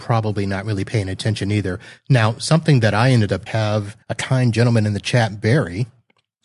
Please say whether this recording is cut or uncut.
cut